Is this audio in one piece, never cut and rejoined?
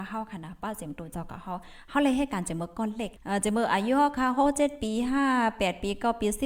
no; 1 cut; at 3.2 s

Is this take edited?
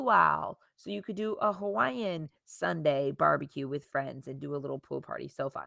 no; 0 cuts

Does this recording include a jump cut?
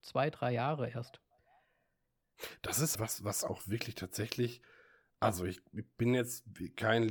yes; 1 cut; at 2.9 s

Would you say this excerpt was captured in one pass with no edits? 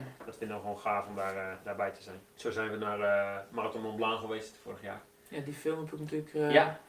no; 1 cut; at 2.3 s

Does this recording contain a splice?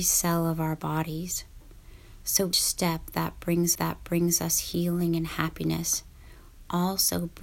yes; 2 cuts; at 2.5 s, 3.8 s

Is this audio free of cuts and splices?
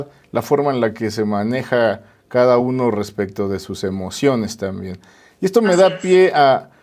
yes; 0 cuts

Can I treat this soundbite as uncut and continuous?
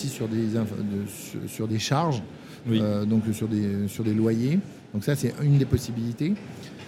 yes; 0 cuts

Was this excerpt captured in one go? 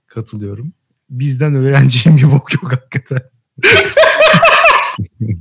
yes; 0 cuts

